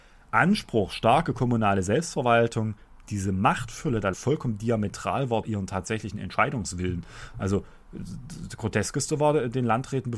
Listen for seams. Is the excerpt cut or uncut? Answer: cut